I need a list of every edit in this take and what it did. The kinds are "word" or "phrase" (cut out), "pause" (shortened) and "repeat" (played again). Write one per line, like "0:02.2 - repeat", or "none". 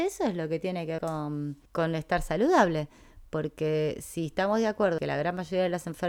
0:01.0 - word
0:01.7 - pause
0:05.0 - word